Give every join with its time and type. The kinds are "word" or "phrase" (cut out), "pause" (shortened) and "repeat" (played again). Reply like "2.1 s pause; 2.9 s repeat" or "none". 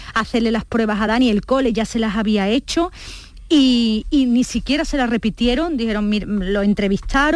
none